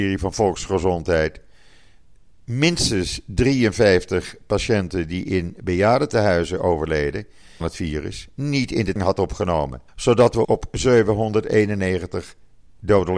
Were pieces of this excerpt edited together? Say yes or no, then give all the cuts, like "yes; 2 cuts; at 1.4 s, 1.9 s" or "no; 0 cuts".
yes; 4 cuts; at 7.6 s, 9.0 s, 9.9 s, 10.4 s